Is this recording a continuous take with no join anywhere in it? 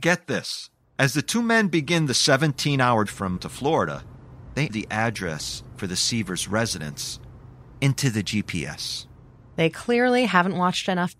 no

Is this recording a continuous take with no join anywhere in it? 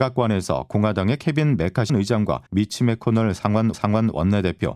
no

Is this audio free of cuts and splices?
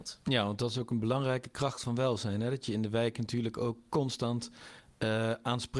yes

